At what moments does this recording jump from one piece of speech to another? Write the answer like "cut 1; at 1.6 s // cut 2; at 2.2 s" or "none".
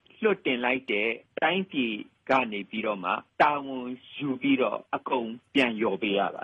cut 1; at 4.9 s